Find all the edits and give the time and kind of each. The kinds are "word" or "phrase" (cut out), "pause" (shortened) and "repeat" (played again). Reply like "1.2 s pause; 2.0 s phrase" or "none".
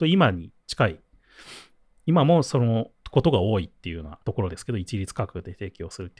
3.0 s pause; 4.2 s pause